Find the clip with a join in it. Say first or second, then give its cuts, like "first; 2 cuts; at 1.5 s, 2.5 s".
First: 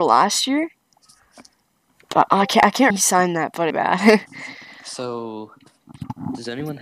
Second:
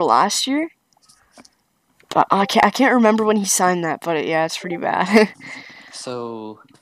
first; 2 cuts; at 2.9 s, 3.7 s